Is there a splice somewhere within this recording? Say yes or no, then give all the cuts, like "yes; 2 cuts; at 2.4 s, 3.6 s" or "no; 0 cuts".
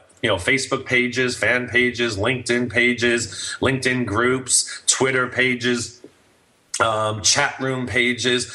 no; 0 cuts